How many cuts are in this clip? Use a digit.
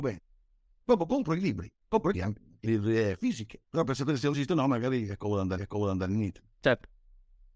7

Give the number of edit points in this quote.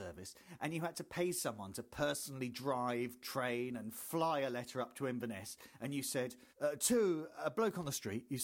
1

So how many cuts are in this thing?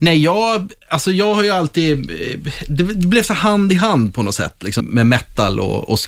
1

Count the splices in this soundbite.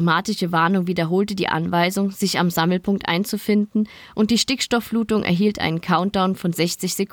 0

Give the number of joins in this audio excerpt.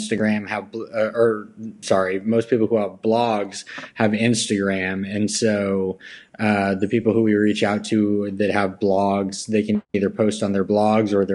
0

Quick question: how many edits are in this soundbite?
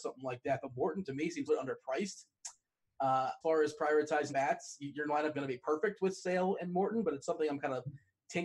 5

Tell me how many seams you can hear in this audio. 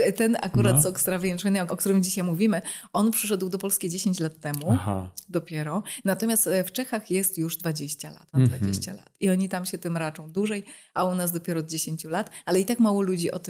2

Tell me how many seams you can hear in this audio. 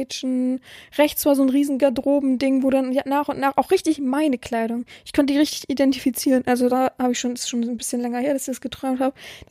1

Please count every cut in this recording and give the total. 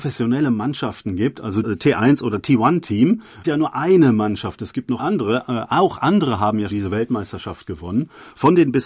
4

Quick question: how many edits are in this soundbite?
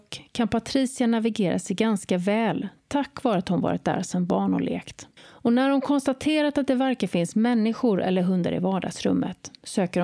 1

